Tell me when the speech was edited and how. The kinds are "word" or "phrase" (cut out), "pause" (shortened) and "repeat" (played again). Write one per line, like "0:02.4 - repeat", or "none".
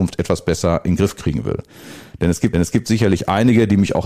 0:02.5 - repeat